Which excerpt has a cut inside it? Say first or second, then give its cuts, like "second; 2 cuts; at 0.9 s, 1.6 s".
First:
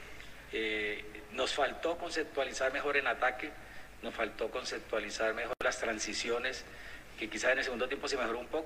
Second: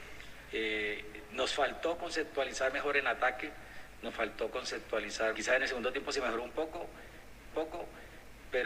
second; 2 cuts; at 5.3 s, 7.5 s